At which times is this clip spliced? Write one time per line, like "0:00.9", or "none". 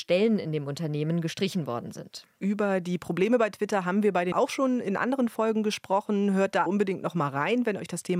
0:04.3
0:06.7